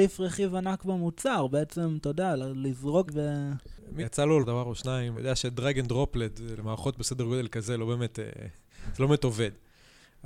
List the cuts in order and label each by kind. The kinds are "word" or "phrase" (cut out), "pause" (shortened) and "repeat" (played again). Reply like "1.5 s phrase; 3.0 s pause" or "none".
3.1 s phrase; 4.0 s word; 4.4 s word; 5.1 s word